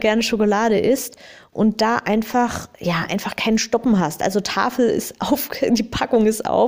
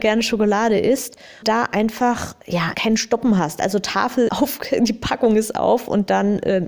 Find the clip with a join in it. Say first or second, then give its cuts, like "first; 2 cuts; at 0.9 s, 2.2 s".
second; 3 cuts; at 1.4 s, 2.7 s, 4.3 s